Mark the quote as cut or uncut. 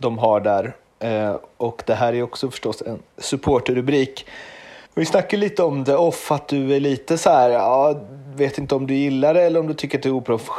cut